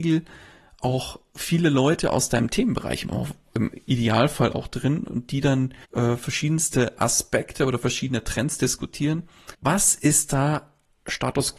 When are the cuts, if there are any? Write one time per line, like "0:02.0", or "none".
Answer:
0:05.8
0:09.5